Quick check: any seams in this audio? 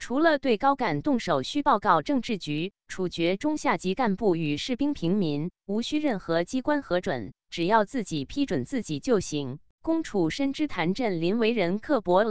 yes; 1 cut; at 9.7 s

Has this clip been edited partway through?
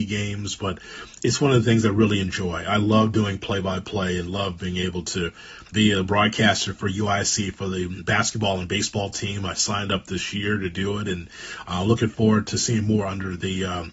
yes; 1 cut; at 5.7 s

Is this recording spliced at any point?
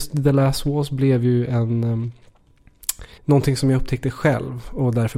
yes; 1 cut; at 3.2 s

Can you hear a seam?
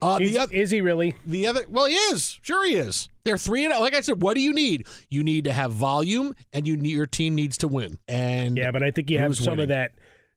yes; 1 cut; at 8.0 s

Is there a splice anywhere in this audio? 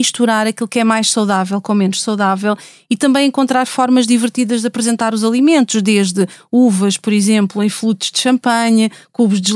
no; 0 cuts

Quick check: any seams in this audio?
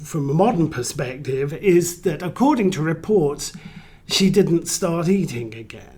no; 0 cuts

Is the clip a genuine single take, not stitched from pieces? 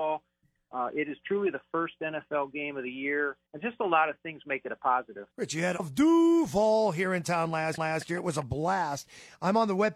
no; 4 cuts; at 3.5 s, 5.3 s, 5.8 s, 7.8 s

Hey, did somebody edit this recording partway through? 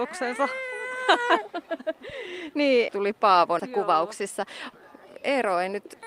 yes; 2 cuts; at 2.9 s, 3.6 s

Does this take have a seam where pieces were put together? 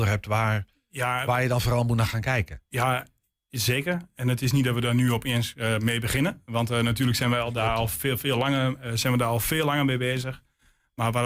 no; 0 cuts

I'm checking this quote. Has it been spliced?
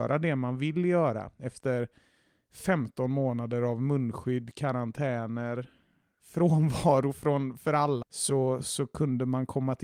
yes; 1 cut; at 8.0 s

